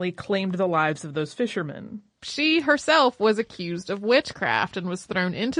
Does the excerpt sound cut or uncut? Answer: uncut